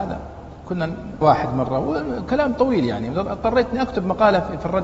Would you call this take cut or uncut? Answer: cut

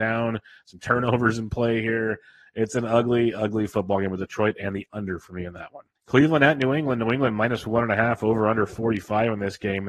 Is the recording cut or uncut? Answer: cut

